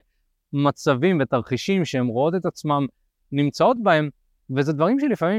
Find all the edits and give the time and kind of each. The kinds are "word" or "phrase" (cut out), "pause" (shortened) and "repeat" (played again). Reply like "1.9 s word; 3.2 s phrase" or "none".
none